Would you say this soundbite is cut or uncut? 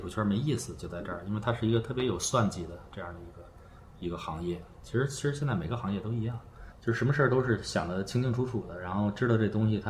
cut